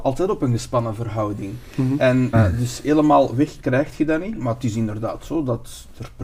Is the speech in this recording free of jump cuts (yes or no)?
no